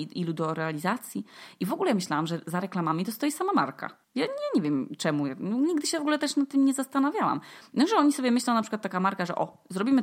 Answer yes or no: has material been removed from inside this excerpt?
yes